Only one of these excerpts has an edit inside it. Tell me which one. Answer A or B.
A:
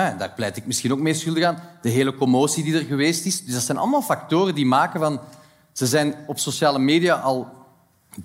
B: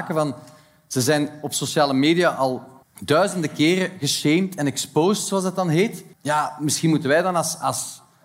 B